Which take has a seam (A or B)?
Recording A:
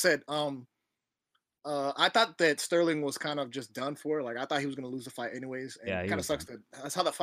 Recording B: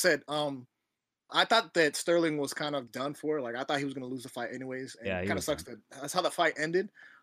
B